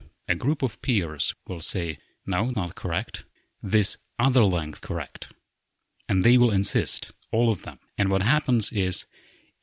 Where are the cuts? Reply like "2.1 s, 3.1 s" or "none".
2.5 s, 3.4 s, 4.8 s, 7.9 s